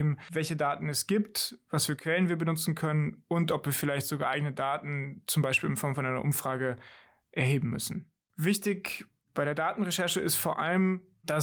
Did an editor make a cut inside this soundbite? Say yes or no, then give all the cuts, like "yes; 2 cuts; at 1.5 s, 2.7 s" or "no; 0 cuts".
no; 0 cuts